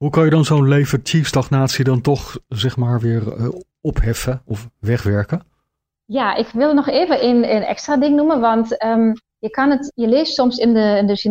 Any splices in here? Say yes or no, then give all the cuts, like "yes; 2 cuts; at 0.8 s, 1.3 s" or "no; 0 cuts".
no; 0 cuts